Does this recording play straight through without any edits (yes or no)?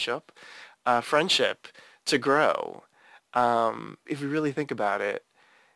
no